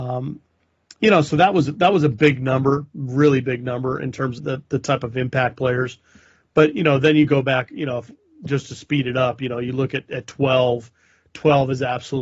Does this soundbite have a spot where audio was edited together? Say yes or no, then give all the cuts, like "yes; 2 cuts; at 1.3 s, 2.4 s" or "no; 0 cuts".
yes; 1 cut; at 4.4 s